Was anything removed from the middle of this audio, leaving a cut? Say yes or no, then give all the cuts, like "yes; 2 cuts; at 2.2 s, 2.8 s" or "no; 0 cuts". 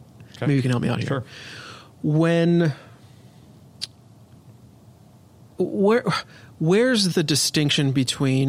yes; 2 cuts; at 5.6 s, 7.1 s